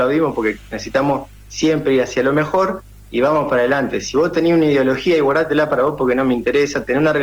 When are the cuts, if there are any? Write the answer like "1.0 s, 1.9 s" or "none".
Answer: none